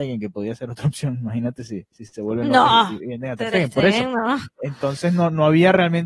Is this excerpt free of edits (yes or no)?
yes